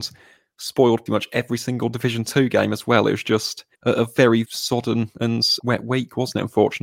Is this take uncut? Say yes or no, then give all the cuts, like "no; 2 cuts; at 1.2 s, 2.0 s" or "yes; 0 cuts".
no; 4 cuts; at 1.1 s, 3.7 s, 4.4 s, 5.6 s